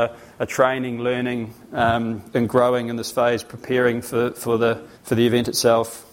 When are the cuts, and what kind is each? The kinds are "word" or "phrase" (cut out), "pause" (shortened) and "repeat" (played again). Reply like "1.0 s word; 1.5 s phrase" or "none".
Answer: 2.3 s word; 4.9 s pause